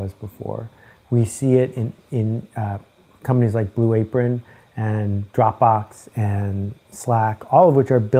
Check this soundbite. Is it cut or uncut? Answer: uncut